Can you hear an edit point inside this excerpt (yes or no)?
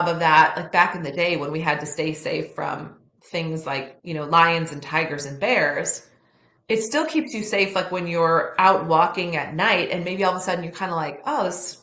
yes